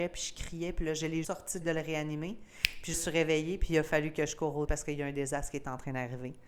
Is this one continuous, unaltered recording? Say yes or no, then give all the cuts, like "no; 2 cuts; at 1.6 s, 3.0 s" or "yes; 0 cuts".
no; 4 cuts; at 1.2 s, 1.6 s, 2.9 s, 4.7 s